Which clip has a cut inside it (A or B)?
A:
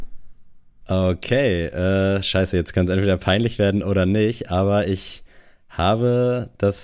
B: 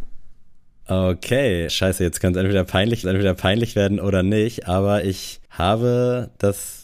B